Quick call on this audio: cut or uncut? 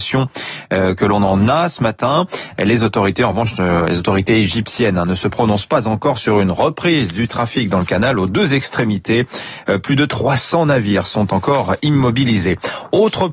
uncut